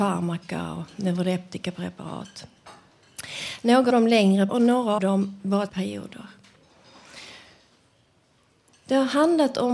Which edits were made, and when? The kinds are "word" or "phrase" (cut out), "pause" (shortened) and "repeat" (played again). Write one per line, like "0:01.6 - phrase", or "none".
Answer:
0:03.9 - word
0:04.5 - word
0:05.0 - word
0:05.7 - phrase